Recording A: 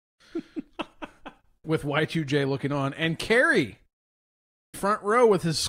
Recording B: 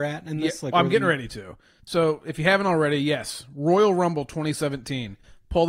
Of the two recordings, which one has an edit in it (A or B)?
A